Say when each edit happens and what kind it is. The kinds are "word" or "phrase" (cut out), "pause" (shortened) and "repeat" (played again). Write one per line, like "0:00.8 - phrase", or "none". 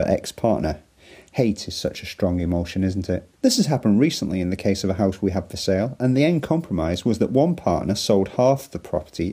0:03.3 - pause